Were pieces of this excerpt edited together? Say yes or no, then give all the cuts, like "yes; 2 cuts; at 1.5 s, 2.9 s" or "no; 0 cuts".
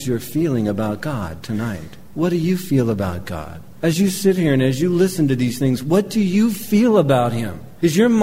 no; 0 cuts